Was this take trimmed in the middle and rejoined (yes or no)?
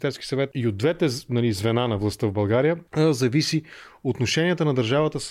no